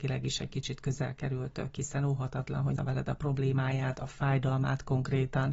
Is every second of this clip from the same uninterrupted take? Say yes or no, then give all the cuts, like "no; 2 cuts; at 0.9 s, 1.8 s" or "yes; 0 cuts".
no; 1 cut; at 2.8 s